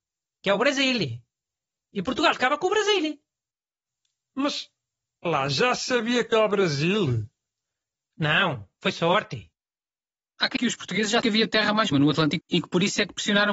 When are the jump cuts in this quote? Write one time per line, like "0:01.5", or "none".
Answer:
0:02.3
0:05.3
0:06.3
0:10.6
0:11.2
0:11.9
0:12.4